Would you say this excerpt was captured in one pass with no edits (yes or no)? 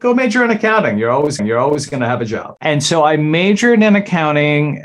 no